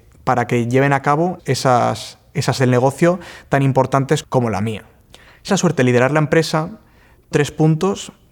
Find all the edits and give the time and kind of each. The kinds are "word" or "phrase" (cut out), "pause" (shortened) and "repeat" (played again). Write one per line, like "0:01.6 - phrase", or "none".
0:01.4 - word
0:02.6 - word
0:04.2 - word
0:05.5 - word
0:07.3 - word